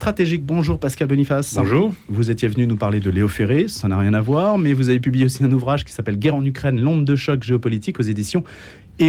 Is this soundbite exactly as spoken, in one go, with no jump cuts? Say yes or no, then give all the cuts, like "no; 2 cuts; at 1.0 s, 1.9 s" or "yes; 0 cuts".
yes; 0 cuts